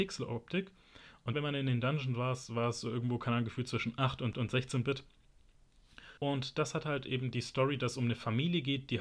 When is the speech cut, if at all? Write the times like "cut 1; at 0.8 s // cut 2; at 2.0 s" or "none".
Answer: cut 1; at 1.3 s // cut 2; at 4.3 s // cut 3; at 6.2 s